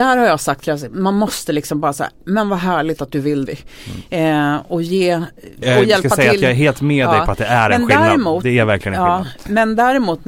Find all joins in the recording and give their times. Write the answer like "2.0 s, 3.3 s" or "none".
3.5 s, 5.6 s

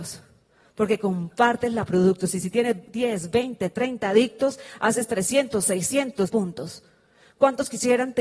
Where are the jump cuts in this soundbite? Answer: 1.9 s, 6.3 s

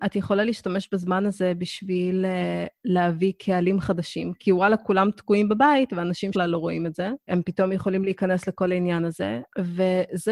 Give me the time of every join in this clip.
6.3 s, 7.3 s

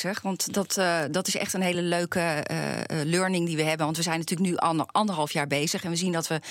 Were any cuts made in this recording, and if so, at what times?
none

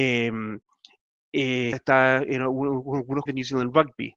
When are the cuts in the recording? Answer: 1.7 s, 3.3 s

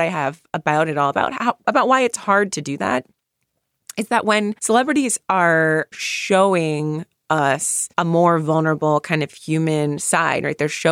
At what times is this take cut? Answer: 4.6 s, 5.9 s, 7.9 s

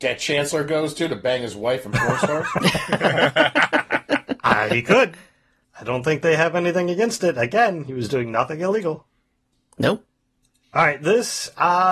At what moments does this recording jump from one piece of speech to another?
none

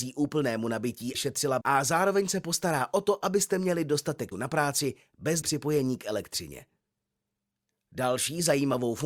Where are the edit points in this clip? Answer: 1.1 s, 1.6 s, 4.3 s, 5.4 s

